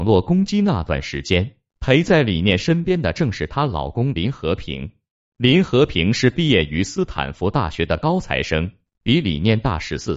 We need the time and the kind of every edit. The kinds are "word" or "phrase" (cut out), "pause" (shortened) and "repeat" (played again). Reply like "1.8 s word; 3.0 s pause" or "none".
none